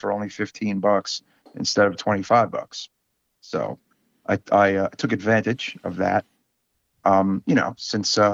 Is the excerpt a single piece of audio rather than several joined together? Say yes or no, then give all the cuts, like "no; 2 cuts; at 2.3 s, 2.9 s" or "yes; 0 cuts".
yes; 0 cuts